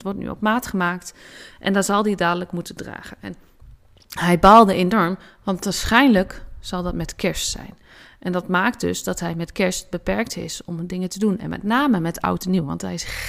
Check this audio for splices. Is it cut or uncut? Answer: uncut